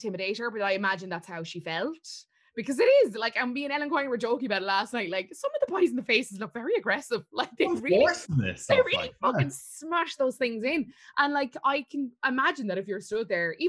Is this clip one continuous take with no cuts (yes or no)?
yes